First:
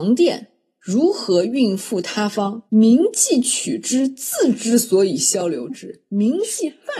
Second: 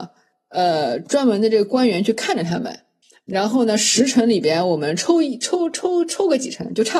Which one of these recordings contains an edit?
first; 1 cut; at 2.7 s

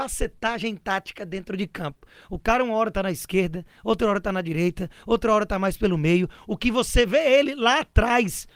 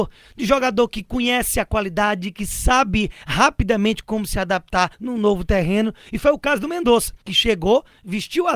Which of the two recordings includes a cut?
second; 2 cuts; at 4.9 s, 7.2 s

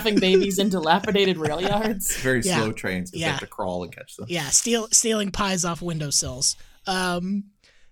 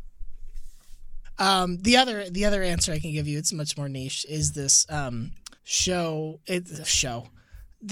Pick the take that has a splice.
second; 1 cut; at 5.6 s

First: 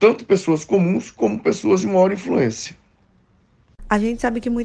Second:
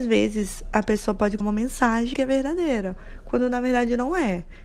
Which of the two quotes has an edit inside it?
second; 2 cuts; at 1.4 s, 2.1 s

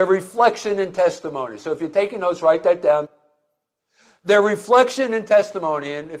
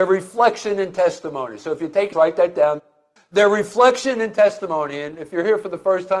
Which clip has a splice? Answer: second; 2 cuts; at 2.1 s, 3.2 s

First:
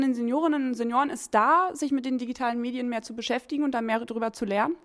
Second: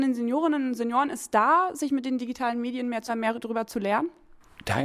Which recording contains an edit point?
second; 1 cut; at 3.1 s

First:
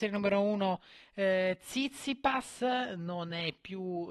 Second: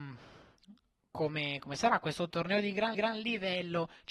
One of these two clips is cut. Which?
second; 2 cuts; at 2.3 s, 2.9 s

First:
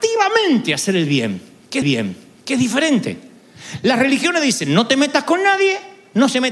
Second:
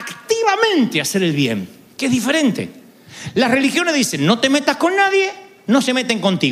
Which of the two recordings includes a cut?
first; 1 cut; at 1.8 s

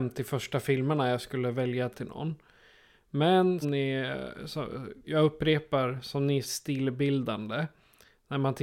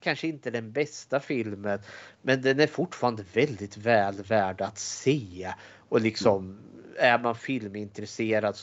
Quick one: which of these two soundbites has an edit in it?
first; 4 cuts; at 1.9 s, 3.6 s, 5.0 s, 6.4 s

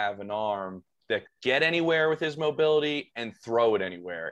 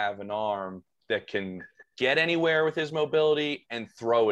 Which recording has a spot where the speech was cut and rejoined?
first; 1 cut; at 1.3 s

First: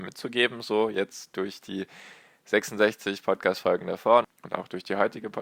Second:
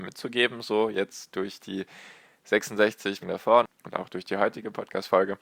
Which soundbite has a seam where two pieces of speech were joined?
second; 1 cut; at 3.2 s

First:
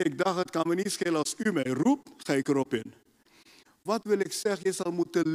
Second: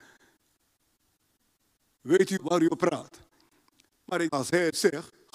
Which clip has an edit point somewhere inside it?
second; 3 cuts; at 2.4 s, 2.7 s, 4.3 s

